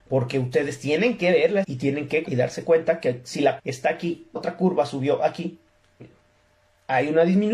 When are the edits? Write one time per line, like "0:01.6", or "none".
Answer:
0:01.6
0:02.2
0:03.6
0:04.4
0:06.0